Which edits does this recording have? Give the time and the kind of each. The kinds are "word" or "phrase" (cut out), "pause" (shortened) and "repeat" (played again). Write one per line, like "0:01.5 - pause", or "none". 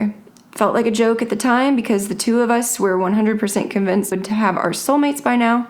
0:04.1 - word

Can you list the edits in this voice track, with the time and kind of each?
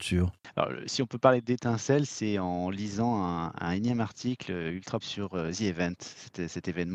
0:05.0 - word

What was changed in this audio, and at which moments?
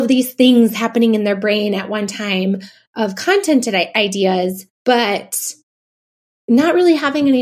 0:04.7 - pause

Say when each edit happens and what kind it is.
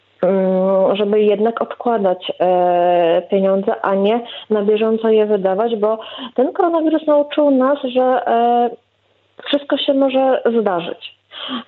none

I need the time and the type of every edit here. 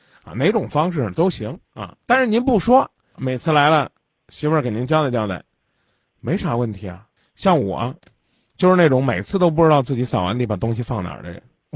0:01.6 - pause
0:03.1 - word
0:07.2 - pause

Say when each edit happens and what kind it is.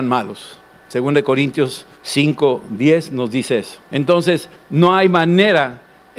0:01.9 - pause
0:03.8 - pause

